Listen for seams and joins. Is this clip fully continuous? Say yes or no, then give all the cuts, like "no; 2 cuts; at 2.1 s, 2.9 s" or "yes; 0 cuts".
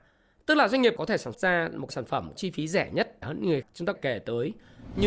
no; 7 cuts; at 1.0 s, 1.3 s, 1.9 s, 2.3 s, 3.2 s, 3.6 s, 3.9 s